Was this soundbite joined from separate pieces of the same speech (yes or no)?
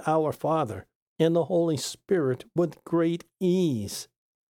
no